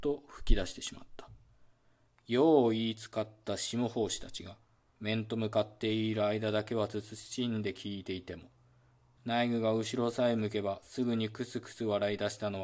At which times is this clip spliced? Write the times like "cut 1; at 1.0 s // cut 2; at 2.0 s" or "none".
none